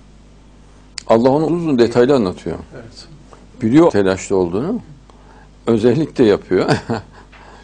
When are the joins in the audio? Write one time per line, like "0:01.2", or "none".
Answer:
0:01.5
0:03.9